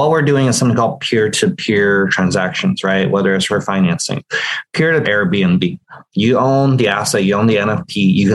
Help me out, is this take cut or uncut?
cut